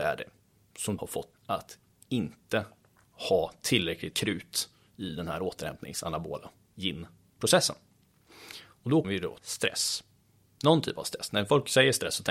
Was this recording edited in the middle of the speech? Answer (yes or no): yes